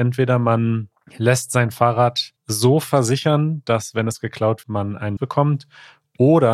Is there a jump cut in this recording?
yes; 3 cuts; at 2.4 s, 4.6 s, 5.2 s

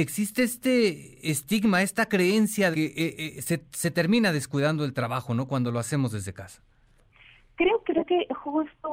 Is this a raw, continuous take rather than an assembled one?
no; 2 cuts; at 2.7 s, 7.9 s

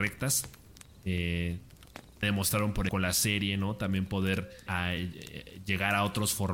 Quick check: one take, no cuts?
no; 3 cuts; at 2.2 s, 2.9 s, 4.7 s

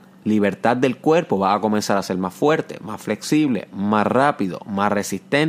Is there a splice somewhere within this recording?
no; 0 cuts

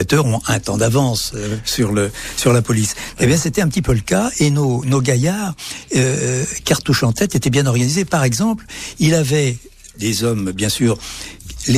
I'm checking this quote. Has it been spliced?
yes; 1 cut; at 9.9 s

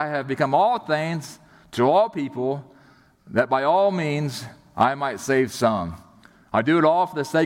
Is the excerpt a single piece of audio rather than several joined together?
yes; 0 cuts

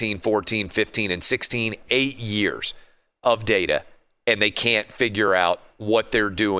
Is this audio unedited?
yes; 0 cuts

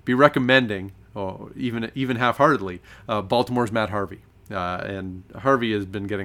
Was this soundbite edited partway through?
no; 0 cuts

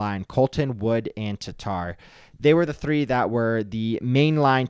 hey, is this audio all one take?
yes; 0 cuts

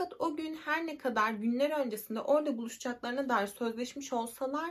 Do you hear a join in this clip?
no; 0 cuts

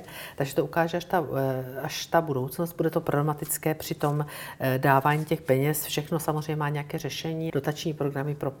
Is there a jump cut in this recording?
yes; 1 cut; at 7.5 s

